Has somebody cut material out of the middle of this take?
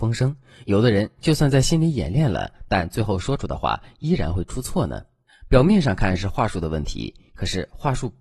yes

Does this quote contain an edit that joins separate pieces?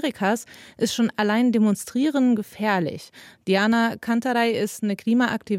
no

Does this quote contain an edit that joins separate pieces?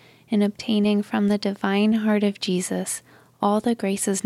no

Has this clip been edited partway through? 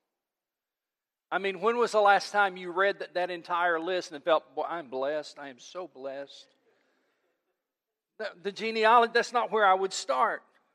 no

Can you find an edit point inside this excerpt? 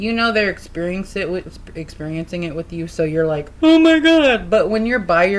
no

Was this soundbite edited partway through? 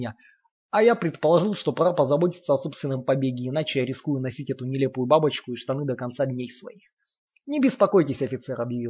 no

